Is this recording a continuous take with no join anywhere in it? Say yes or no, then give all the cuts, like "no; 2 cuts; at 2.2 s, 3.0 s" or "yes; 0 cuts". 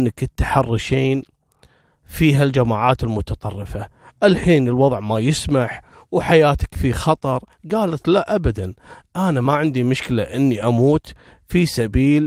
yes; 0 cuts